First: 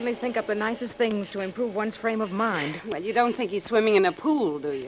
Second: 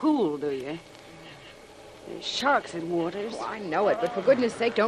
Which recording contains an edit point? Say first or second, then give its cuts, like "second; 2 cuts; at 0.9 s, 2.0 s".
second; 1 cut; at 2.8 s